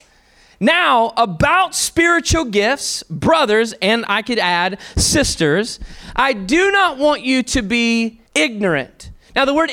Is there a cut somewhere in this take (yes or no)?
yes